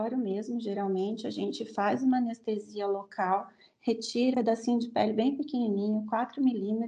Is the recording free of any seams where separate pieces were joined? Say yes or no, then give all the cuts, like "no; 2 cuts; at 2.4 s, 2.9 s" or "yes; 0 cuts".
no; 1 cut; at 4.3 s